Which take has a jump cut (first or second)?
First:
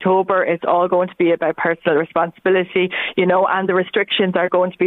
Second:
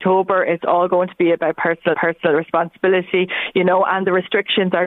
second